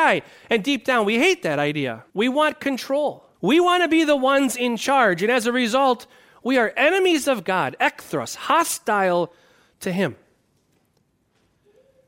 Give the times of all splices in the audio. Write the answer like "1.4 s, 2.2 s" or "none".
2.1 s, 3.3 s